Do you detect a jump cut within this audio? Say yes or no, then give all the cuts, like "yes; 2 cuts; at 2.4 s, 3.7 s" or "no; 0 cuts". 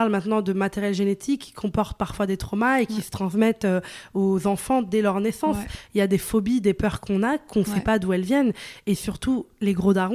no; 0 cuts